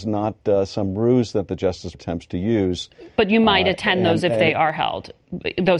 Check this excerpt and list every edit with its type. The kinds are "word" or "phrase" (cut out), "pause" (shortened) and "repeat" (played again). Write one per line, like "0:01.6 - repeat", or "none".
0:01.9 - word